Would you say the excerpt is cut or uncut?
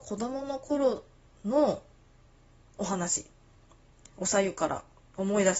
uncut